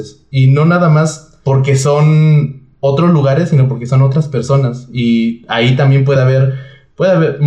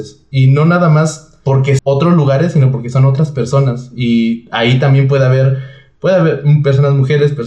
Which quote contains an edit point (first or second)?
second